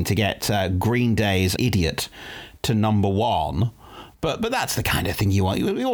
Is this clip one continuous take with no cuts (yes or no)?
no